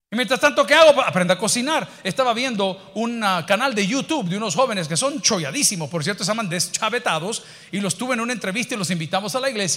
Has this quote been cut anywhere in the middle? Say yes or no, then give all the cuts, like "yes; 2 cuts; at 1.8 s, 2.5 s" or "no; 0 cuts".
no; 0 cuts